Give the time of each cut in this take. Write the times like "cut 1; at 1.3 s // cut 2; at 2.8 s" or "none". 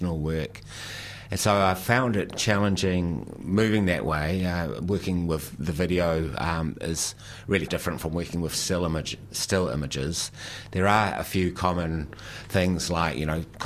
cut 1; at 2.4 s // cut 2; at 7.7 s